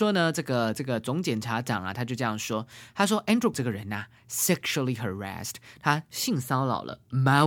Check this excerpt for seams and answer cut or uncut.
cut